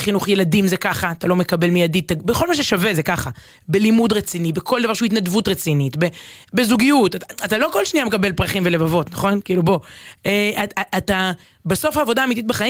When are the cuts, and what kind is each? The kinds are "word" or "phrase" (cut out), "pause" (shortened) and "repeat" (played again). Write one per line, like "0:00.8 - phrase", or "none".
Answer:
none